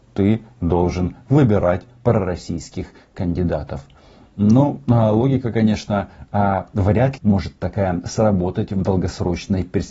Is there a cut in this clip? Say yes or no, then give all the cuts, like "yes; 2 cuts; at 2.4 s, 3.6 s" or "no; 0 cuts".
yes; 1 cut; at 7.2 s